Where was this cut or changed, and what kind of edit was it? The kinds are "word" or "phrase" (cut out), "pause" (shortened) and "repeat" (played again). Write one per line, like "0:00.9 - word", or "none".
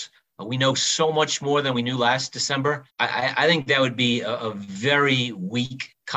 0:02.9 - pause